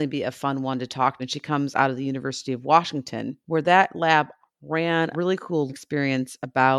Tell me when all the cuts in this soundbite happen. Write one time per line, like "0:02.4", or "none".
0:01.2
0:03.4
0:04.4
0:05.1
0:05.7